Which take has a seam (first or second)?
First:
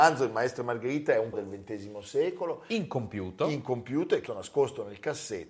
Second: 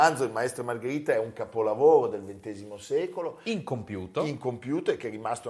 first